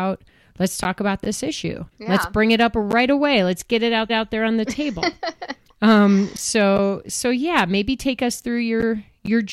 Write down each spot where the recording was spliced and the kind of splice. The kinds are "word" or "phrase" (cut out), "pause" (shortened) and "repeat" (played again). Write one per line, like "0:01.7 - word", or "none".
0:01.9 - pause
0:04.1 - repeat